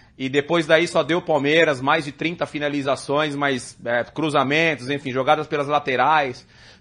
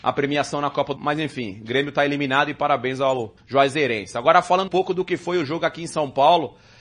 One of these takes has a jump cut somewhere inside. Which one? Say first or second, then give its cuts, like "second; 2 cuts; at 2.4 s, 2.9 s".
second; 3 cuts; at 1.0 s, 3.4 s, 4.7 s